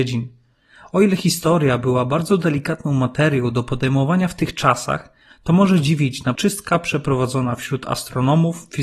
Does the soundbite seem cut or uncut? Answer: cut